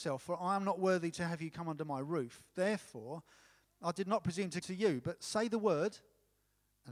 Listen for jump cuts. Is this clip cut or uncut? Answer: cut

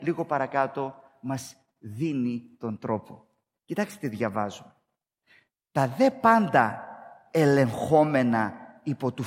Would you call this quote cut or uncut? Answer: uncut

